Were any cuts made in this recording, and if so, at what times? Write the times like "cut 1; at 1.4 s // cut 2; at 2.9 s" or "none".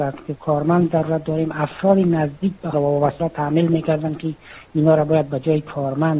cut 1; at 2.7 s // cut 2; at 3.2 s